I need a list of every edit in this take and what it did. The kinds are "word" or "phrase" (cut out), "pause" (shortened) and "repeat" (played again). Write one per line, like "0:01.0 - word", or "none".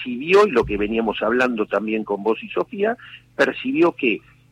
none